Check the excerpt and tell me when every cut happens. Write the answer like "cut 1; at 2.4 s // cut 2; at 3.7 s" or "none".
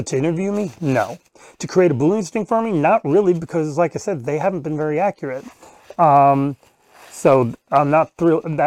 none